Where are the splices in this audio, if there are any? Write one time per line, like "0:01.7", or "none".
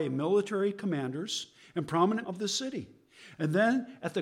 0:02.2